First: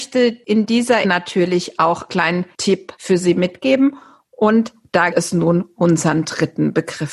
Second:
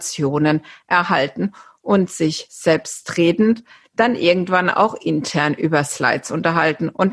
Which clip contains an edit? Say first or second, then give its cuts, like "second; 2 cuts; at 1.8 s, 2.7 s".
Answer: first; 4 cuts; at 1.0 s, 2.1 s, 5.1 s, 5.8 s